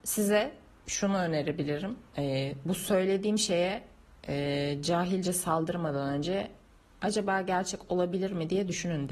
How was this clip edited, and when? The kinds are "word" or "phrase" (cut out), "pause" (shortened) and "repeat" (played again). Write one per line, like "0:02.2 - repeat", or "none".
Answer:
none